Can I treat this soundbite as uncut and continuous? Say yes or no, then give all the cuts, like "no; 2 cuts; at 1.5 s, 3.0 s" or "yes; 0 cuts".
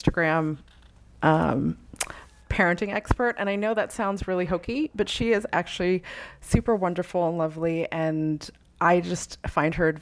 yes; 0 cuts